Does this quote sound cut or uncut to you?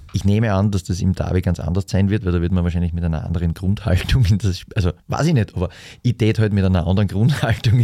cut